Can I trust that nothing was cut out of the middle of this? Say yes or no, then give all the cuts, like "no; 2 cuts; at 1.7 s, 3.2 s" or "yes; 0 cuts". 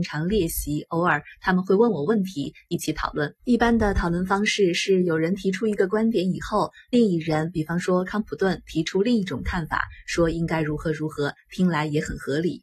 no; 1 cut; at 3.4 s